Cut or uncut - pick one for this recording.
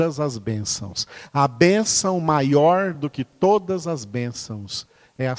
uncut